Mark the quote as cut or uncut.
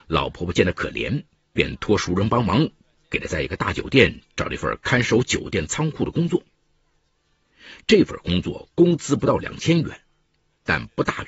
uncut